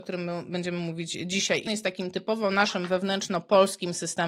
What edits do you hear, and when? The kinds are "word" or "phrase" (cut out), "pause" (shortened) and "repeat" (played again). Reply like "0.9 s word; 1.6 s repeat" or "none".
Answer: 1.7 s word